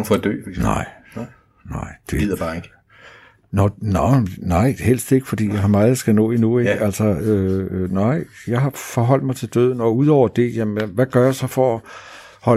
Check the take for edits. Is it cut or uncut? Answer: uncut